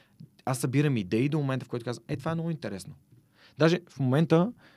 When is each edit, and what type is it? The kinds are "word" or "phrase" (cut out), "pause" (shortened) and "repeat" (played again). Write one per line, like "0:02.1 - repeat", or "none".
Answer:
none